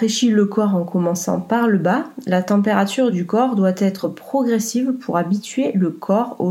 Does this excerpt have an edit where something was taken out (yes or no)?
no